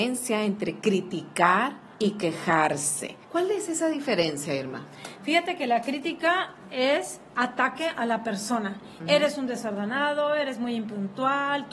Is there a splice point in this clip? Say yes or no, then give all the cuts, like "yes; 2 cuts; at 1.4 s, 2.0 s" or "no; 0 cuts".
yes; 2 cuts; at 1.9 s, 3.2 s